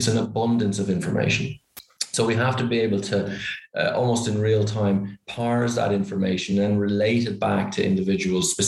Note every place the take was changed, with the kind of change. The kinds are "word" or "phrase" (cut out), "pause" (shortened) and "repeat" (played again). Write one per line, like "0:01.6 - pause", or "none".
none